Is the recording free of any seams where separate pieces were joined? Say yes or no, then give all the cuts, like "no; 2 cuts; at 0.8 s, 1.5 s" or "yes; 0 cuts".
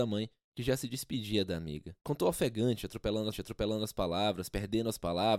no; 2 cuts; at 2.0 s, 3.3 s